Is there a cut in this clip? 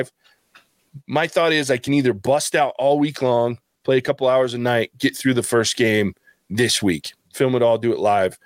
no; 0 cuts

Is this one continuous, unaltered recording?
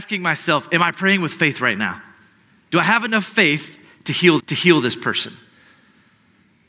no; 1 cut; at 4.4 s

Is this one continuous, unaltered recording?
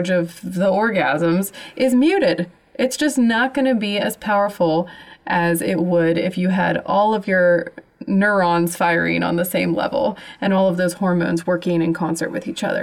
yes; 0 cuts

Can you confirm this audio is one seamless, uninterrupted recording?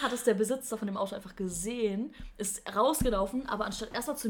yes; 0 cuts

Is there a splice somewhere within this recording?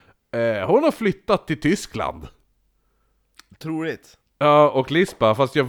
no; 0 cuts

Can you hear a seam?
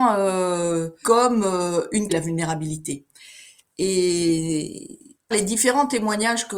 yes; 3 cuts; at 1.0 s, 2.1 s, 5.3 s

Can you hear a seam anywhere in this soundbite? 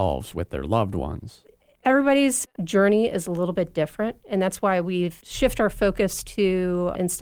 no; 0 cuts

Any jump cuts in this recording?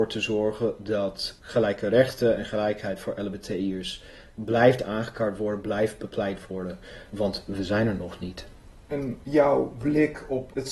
no; 0 cuts

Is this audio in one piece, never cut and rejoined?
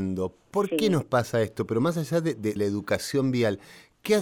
no; 1 cut; at 2.6 s

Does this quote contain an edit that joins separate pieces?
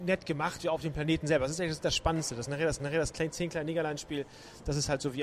yes; 1 cut; at 2.8 s

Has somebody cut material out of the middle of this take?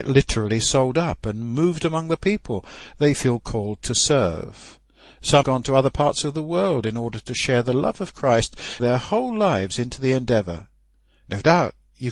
yes; 2 cuts; at 5.4 s, 8.8 s

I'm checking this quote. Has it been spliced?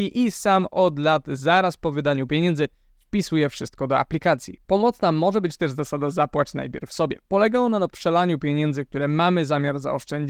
no; 0 cuts

